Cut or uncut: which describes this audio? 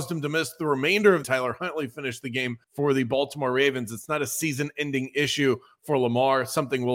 cut